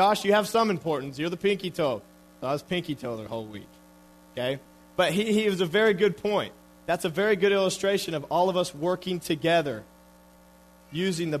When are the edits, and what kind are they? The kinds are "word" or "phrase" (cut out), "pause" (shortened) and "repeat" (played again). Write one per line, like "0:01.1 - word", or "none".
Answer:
none